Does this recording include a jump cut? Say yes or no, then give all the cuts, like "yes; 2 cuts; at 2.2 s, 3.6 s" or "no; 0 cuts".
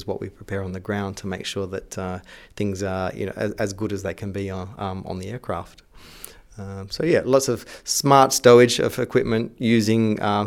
no; 0 cuts